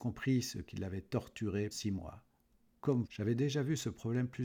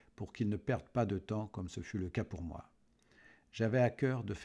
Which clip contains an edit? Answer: first; 2 cuts; at 1.7 s, 3.0 s

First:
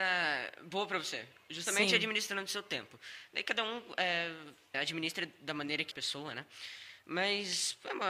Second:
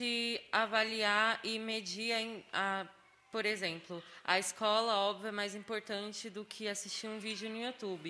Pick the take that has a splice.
first; 2 cuts; at 4.7 s, 5.9 s

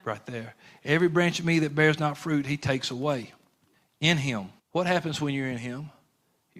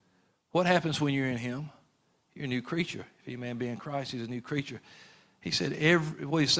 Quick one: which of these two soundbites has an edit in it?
first; 2 cuts; at 3.7 s, 4.6 s

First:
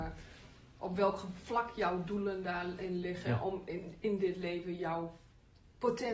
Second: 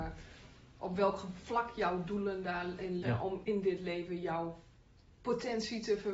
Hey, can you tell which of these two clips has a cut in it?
second; 2 cuts; at 3.0 s, 3.4 s

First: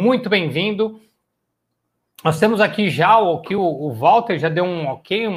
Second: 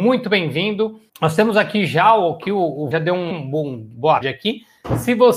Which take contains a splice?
second; 4 cuts; at 1.1 s, 2.9 s, 3.3 s, 4.2 s

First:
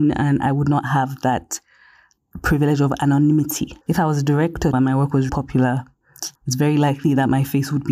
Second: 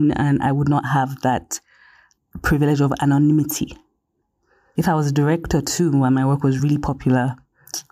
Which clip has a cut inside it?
first; 4 cuts; at 3.8 s, 4.7 s, 5.3 s, 6.4 s

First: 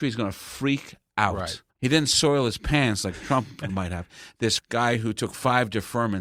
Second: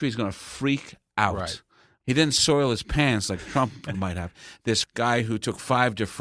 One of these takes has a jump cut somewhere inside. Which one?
first; 1 cut; at 1.7 s

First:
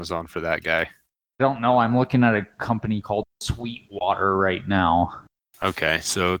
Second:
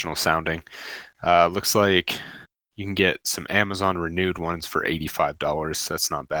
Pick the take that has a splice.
first; 2 cuts; at 1.4 s, 5.3 s

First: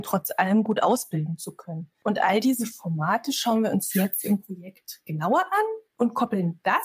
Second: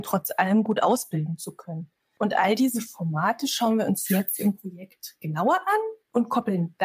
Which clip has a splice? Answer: first; 1 cut; at 1.9 s

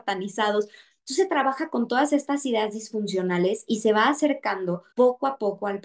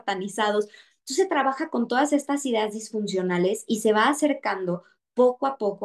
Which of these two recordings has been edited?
first; 1 cut; at 4.9 s

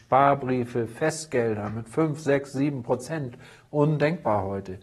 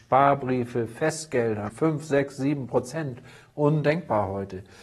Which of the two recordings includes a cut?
second; 1 cut; at 1.7 s

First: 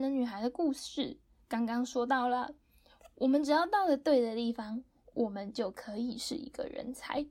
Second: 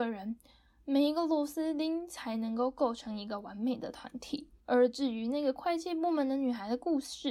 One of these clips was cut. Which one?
second; 1 cut; at 4.6 s

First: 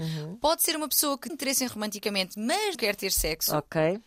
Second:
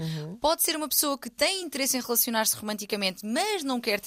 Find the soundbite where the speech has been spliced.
first; 3 cuts; at 1.3 s, 1.7 s, 2.7 s

